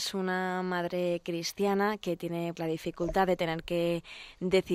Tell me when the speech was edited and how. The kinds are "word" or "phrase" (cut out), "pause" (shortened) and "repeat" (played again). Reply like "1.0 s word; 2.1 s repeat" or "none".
2.6 s word